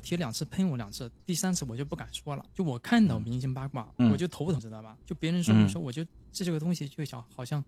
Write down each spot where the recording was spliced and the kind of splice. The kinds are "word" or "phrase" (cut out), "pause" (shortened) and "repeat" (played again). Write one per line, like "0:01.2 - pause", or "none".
0:01.2 - pause
0:02.5 - pause
0:04.0 - word
0:04.6 - word
0:05.0 - pause